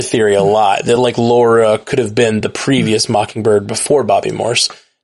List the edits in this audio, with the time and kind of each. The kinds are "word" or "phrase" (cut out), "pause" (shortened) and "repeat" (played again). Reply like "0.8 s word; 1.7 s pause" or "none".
none